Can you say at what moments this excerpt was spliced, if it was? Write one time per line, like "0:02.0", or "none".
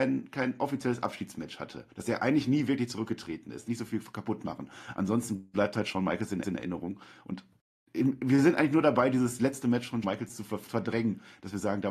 0:01.9
0:03.7
0:06.4
0:10.0